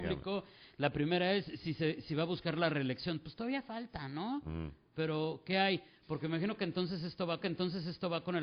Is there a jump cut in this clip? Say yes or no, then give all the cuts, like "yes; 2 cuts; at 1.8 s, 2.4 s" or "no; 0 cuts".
yes; 1 cut; at 7.4 s